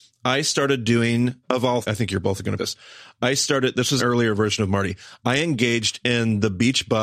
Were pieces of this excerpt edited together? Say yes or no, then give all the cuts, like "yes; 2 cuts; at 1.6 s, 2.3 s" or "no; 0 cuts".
yes; 4 cuts; at 1.4 s, 1.8 s, 2.6 s, 4.0 s